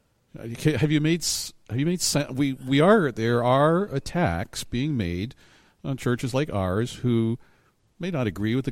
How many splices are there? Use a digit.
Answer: 0